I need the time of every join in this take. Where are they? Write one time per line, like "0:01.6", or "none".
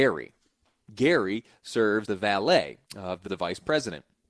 0:02.0
0:02.8
0:03.3